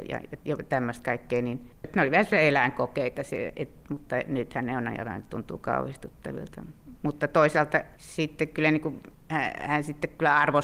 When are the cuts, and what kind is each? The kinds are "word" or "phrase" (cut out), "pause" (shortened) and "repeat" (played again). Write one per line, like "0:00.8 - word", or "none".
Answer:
none